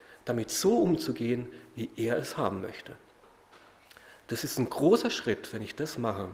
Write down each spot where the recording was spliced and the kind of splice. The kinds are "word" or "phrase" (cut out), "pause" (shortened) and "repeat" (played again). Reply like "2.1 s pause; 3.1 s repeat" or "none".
none